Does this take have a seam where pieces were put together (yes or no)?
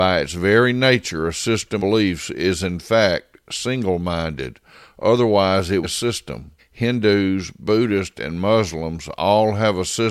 yes